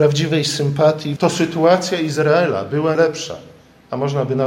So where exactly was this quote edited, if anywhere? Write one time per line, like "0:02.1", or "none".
0:01.2
0:02.9